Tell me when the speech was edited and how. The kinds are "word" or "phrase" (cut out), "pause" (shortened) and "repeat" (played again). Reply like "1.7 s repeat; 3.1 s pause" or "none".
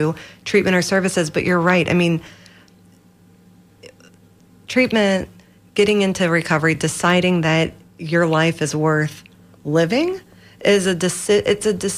none